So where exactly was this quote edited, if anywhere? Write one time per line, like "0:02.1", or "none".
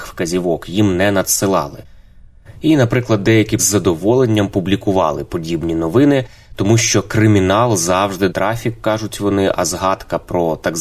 0:03.6
0:08.3